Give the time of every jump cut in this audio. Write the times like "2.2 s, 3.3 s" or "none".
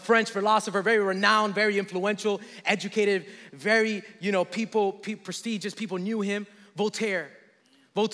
none